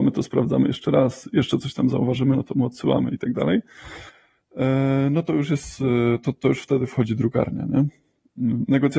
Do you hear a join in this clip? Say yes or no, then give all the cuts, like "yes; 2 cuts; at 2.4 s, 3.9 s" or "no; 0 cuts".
no; 0 cuts